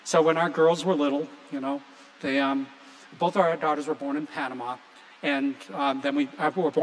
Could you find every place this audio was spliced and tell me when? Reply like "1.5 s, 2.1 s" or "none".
none